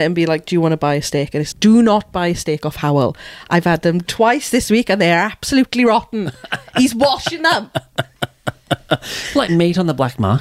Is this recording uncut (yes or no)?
no